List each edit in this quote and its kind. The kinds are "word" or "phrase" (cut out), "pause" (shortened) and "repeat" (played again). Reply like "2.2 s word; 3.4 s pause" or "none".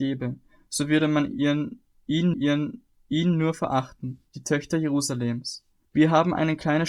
2.3 s repeat; 4.3 s pause; 5.8 s pause